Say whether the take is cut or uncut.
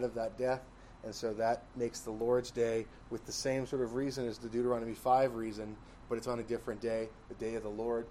uncut